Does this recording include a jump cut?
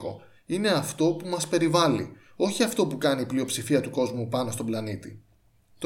no; 0 cuts

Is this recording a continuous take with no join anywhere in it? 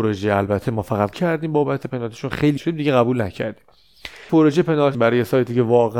no; 5 cuts; at 1.1 s, 1.8 s, 2.6 s, 4.3 s, 4.9 s

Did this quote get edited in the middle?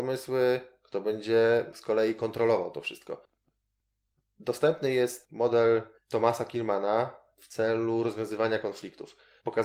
no; 0 cuts

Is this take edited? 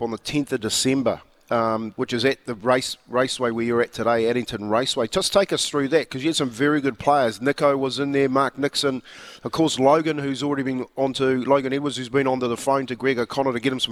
no; 0 cuts

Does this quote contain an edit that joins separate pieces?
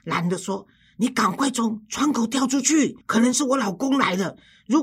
yes; 1 cut; at 3.0 s

